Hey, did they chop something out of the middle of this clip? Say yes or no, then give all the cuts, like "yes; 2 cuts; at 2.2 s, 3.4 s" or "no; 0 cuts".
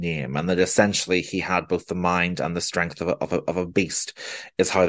no; 0 cuts